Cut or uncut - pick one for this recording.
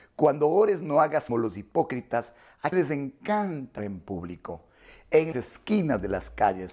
cut